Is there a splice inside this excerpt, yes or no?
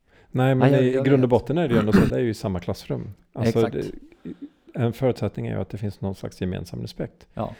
yes